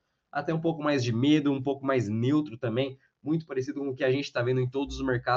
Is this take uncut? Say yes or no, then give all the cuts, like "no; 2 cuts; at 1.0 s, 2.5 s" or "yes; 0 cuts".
yes; 0 cuts